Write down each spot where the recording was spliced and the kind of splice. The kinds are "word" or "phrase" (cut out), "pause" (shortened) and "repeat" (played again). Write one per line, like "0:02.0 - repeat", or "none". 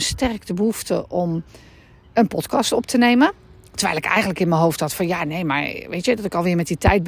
none